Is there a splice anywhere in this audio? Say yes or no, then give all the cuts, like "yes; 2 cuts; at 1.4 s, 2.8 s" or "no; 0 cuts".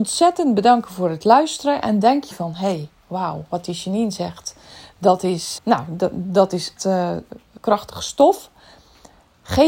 yes; 4 cuts; at 2.3 s, 5.6 s, 6.8 s, 7.6 s